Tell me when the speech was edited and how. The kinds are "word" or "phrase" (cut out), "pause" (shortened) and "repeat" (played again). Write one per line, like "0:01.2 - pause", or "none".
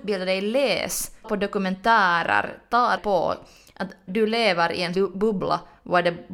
0:01.2 - word
0:03.0 - word
0:04.1 - word
0:04.9 - word